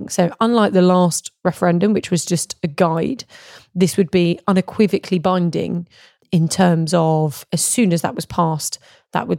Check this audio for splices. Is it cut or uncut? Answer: uncut